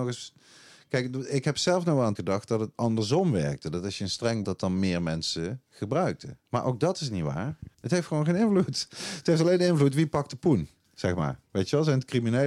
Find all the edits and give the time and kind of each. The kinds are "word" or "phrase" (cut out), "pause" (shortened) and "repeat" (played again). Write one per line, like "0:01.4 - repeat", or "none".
0:02.2 - word
0:02.7 - pause
0:04.4 - phrase
0:06.4 - pause
0:07.7 - pause